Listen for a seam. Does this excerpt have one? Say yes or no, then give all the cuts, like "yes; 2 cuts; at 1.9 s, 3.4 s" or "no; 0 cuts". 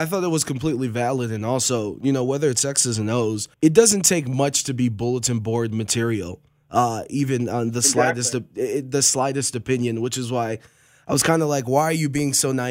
yes; 1 cut; at 3.5 s